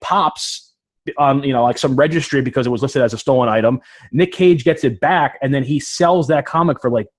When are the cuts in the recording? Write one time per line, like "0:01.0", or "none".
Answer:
none

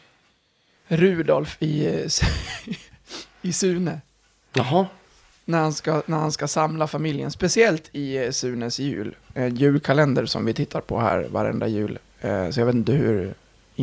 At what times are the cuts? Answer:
none

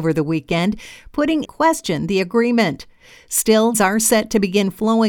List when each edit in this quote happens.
0:01.4
0:03.7

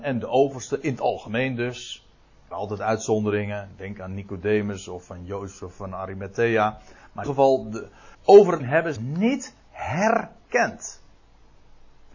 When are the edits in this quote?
0:02.5
0:07.2
0:08.1
0:08.6
0:09.0

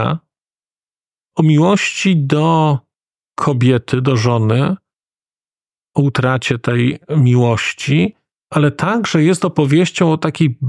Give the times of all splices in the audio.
none

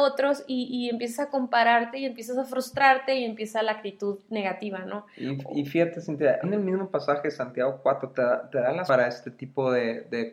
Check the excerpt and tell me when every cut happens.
0:06.4
0:08.9

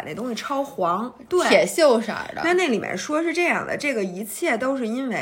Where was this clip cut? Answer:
0:01.3

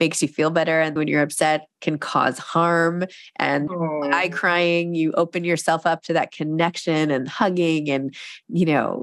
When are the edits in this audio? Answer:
0:01.0
0:01.7
0:03.7

